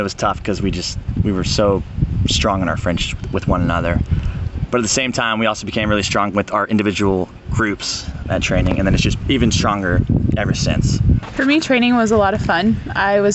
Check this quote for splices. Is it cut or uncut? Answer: uncut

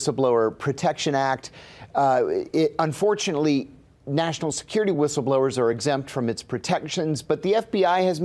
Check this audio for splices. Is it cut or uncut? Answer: uncut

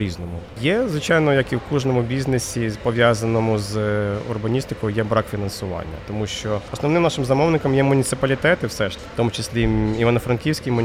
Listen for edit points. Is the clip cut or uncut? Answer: uncut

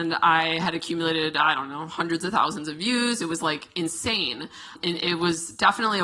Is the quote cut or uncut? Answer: uncut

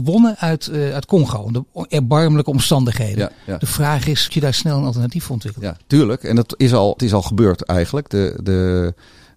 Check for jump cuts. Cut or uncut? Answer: cut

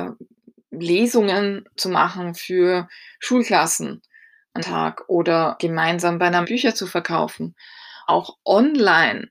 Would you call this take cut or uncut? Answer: cut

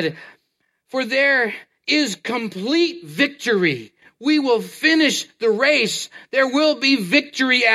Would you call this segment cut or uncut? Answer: uncut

